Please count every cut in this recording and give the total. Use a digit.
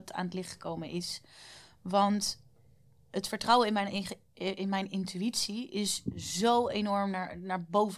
0